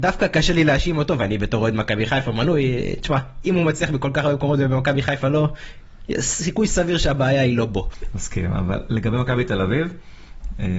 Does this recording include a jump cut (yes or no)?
no